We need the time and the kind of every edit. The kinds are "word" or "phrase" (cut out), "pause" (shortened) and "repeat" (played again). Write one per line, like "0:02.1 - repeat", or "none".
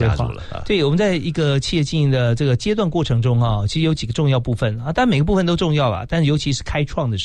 none